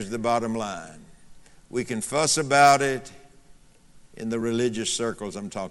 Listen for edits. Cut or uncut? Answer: uncut